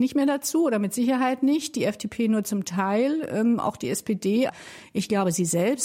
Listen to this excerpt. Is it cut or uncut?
uncut